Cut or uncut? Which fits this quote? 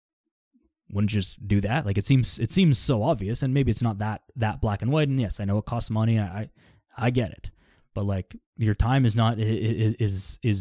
uncut